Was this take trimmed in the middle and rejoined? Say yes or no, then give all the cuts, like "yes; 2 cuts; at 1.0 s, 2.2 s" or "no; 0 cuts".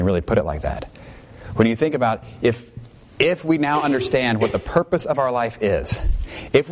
no; 0 cuts